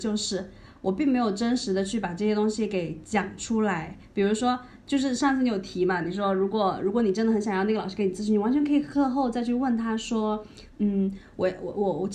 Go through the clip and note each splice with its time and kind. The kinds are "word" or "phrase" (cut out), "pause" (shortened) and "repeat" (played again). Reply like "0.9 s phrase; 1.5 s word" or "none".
none

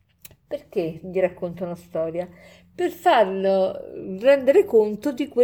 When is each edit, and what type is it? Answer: none

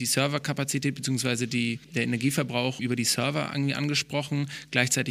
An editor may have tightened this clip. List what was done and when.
1.8 s pause; 2.8 s word

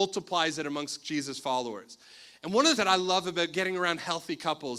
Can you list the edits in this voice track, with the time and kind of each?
2.8 s phrase

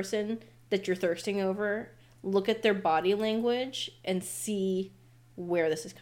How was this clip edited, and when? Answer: none

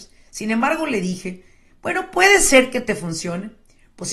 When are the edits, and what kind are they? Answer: none

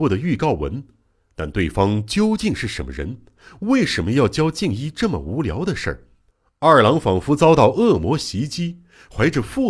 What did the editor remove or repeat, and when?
6.3 s pause

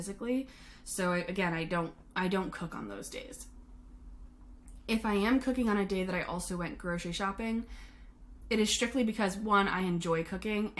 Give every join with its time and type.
none

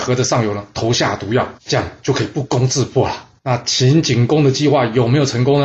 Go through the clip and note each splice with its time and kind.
1.6 s pause; 3.4 s pause

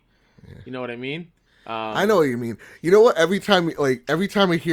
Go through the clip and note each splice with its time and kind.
none

